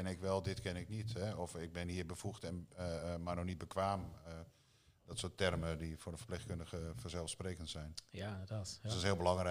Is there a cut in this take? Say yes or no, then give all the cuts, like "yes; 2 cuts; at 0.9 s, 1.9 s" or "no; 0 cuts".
no; 0 cuts